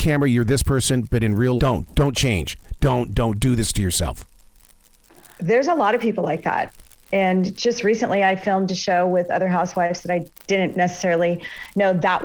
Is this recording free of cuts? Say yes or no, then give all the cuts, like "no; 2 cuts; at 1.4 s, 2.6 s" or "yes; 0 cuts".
no; 1 cut; at 1.6 s